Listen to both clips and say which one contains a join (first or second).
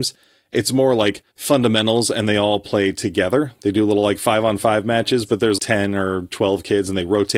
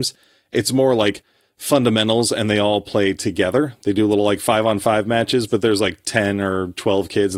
first